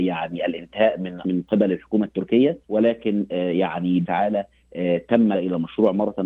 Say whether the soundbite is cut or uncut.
cut